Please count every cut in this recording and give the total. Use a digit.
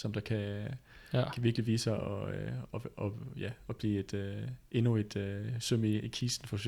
0